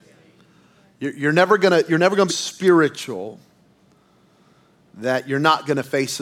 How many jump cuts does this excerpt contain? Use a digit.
1